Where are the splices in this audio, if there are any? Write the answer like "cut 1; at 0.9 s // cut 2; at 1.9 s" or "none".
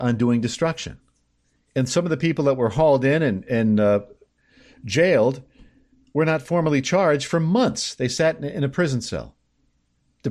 none